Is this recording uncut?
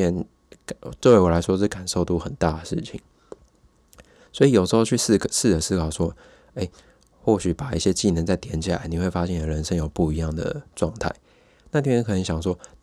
yes; 0 cuts

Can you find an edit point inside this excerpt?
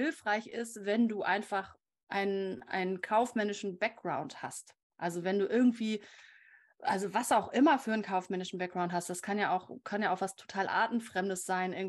no; 0 cuts

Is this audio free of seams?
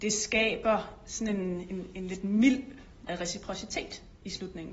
no; 1 cut; at 3.1 s

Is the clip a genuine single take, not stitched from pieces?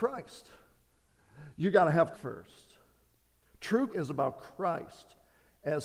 no; 2 cuts; at 2.1 s, 3.9 s

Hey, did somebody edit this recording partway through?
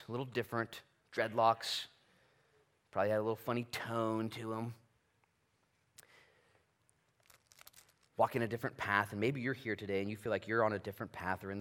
no; 0 cuts

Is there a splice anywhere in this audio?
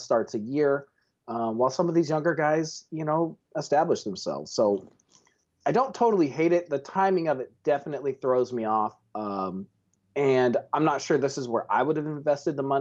no; 0 cuts

